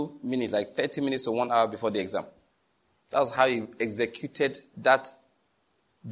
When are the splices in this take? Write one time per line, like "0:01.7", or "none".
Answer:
none